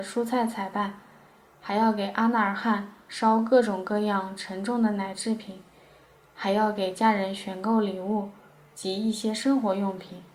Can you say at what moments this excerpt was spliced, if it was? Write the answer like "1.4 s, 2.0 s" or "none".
none